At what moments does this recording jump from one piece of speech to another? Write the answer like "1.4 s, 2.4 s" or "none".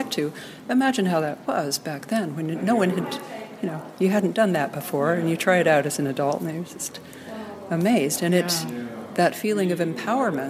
none